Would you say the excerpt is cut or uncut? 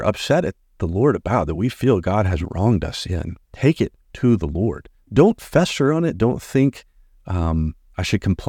cut